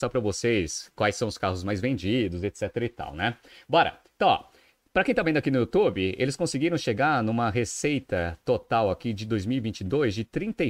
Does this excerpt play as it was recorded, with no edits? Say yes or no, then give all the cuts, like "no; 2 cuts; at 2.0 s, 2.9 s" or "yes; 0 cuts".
yes; 0 cuts